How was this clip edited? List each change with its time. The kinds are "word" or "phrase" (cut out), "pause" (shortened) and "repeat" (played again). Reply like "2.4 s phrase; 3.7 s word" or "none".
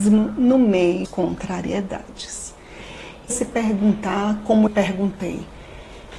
1.0 s word; 3.3 s phrase; 4.7 s phrase